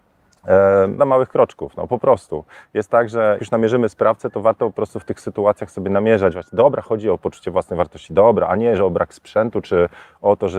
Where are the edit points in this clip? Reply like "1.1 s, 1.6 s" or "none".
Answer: 1.0 s, 3.4 s